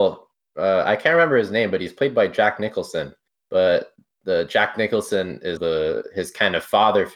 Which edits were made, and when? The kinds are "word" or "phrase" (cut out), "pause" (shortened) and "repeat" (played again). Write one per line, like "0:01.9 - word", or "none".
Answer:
0:05.6 - word